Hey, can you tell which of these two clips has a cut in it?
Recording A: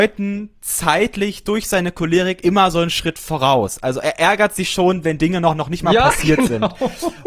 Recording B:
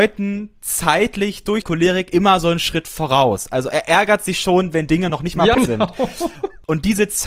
B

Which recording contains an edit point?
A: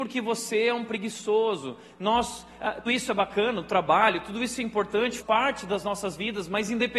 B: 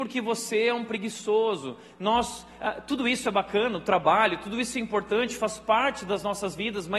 A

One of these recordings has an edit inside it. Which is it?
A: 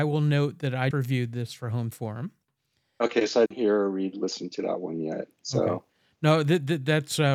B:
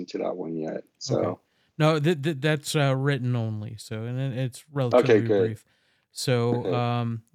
A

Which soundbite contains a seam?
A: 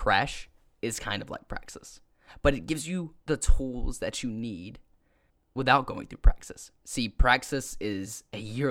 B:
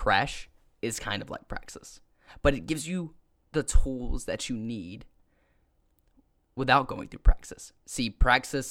A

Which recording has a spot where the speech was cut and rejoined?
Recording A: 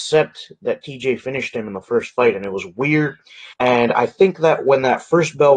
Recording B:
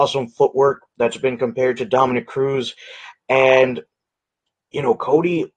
A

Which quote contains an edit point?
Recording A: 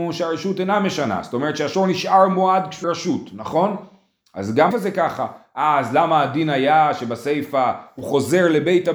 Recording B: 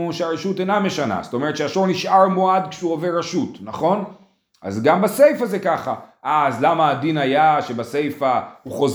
A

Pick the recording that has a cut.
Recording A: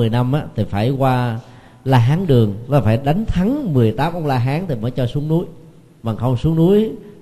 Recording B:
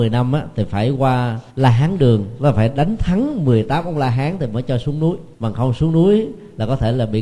B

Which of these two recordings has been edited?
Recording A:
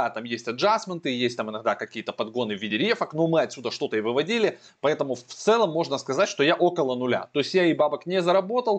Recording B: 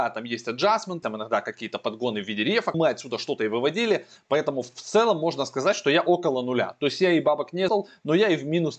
B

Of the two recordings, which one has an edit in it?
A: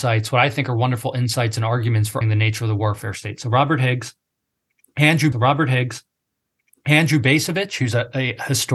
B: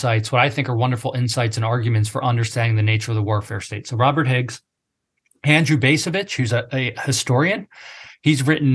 A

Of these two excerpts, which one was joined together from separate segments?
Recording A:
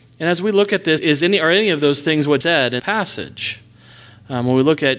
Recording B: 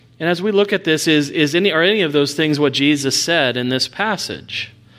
A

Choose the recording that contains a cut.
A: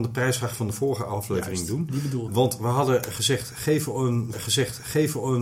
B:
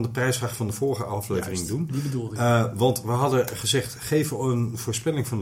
A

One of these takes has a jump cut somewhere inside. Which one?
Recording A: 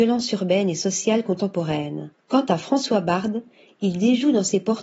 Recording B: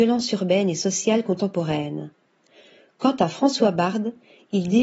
A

